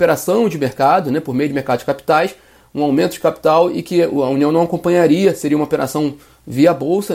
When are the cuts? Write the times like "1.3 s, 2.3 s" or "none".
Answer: none